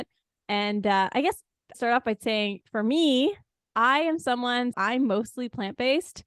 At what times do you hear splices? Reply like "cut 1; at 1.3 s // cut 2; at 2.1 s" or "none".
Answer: cut 1; at 1.7 s // cut 2; at 4.7 s